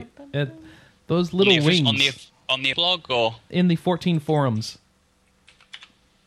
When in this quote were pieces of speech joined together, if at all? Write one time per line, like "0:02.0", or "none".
0:02.7
0:03.5